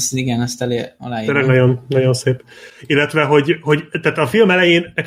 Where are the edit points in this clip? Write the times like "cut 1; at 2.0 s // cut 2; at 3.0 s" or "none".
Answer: none